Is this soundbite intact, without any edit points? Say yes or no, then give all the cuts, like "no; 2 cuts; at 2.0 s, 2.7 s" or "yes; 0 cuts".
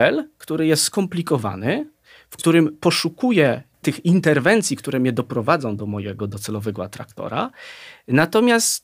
yes; 0 cuts